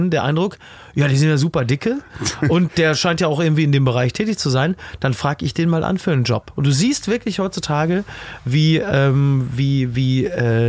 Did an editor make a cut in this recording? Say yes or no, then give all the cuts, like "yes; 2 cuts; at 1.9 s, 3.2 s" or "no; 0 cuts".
no; 0 cuts